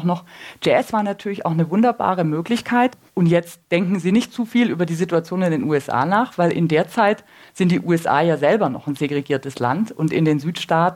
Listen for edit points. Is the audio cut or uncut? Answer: cut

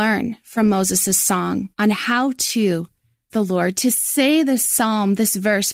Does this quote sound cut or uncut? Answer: cut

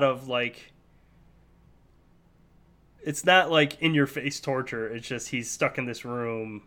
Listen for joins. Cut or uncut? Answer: uncut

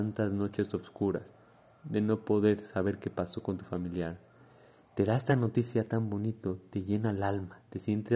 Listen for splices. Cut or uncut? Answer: uncut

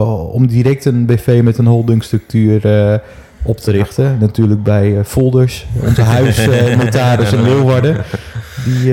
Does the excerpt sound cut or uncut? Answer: uncut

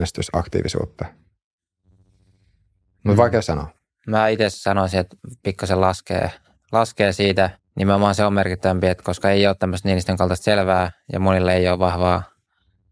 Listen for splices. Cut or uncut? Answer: cut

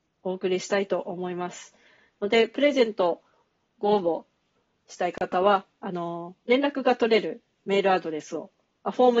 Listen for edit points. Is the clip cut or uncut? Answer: uncut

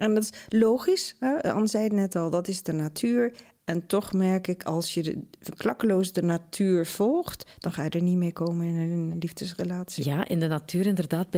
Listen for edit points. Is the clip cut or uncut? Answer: uncut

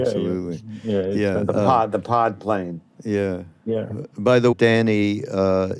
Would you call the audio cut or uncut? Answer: cut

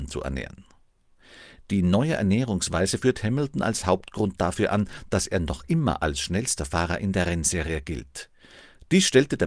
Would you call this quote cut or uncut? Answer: uncut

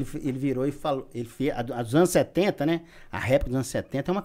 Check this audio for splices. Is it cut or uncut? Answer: uncut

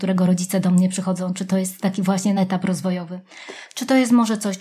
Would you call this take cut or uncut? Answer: cut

